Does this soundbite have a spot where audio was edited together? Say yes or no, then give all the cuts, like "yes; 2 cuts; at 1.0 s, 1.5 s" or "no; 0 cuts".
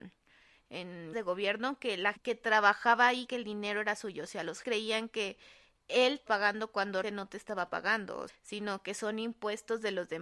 yes; 7 cuts; at 1.1 s, 2.2 s, 3.3 s, 4.6 s, 6.3 s, 7.0 s, 8.3 s